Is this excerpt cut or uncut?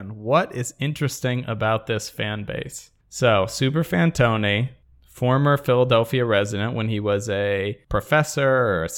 uncut